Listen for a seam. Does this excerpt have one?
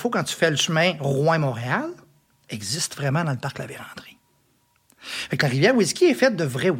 no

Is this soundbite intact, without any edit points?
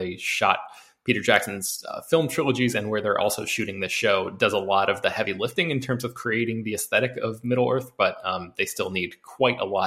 yes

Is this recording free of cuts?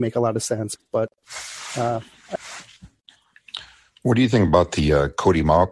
yes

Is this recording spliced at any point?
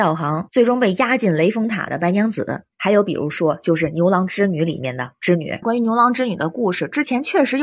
yes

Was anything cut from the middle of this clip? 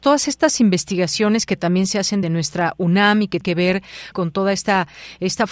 yes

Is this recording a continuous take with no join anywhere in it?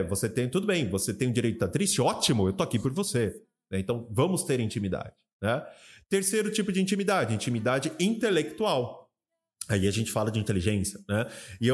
yes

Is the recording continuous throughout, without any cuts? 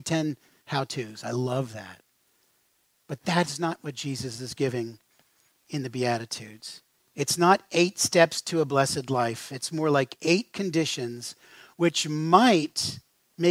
yes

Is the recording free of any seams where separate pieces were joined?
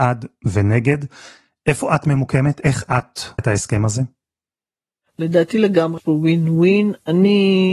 no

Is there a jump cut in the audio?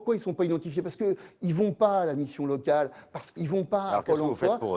yes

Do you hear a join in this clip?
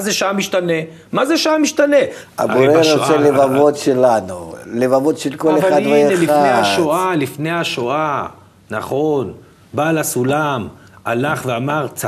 no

